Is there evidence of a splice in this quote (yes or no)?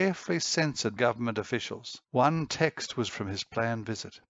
yes